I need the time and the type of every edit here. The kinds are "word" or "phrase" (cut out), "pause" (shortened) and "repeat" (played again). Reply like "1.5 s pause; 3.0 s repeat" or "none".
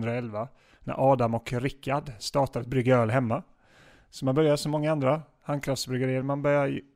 none